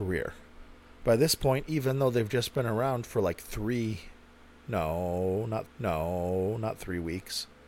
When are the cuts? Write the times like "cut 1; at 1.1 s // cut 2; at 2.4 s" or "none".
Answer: cut 1; at 5.7 s